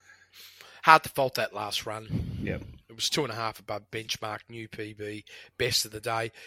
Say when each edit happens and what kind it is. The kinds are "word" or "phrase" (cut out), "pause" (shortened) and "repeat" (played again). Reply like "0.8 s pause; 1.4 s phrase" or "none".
none